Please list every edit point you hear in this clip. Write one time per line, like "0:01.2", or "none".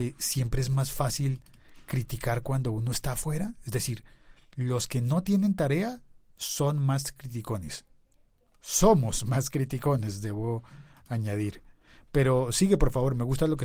none

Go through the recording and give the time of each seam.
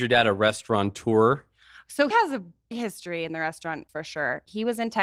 0:02.1
0:02.7
0:03.9

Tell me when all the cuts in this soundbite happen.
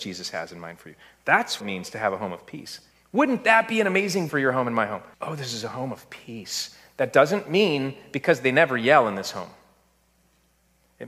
0:01.6
0:02.9
0:04.3
0:05.1

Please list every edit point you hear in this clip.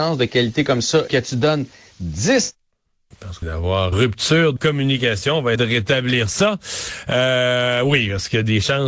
0:01.1
0:03.1
0:03.4
0:03.9
0:04.6
0:05.6

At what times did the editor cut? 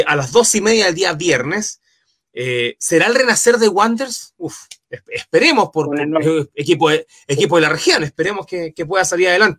none

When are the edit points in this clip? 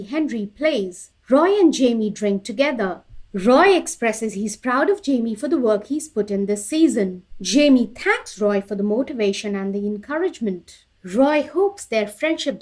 none

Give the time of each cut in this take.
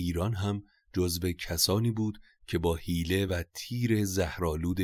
none

